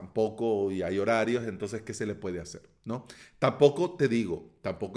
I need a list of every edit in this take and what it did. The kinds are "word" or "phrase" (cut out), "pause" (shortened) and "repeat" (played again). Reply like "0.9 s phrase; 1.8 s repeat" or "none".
none